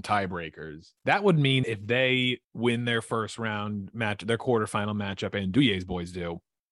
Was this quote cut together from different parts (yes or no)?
yes